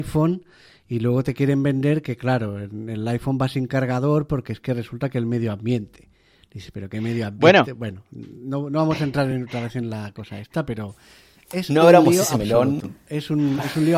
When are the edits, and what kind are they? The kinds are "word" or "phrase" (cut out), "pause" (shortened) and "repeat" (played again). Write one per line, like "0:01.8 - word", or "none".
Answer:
none